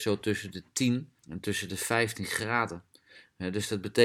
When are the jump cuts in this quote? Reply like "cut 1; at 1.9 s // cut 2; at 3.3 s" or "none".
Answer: cut 1; at 1.2 s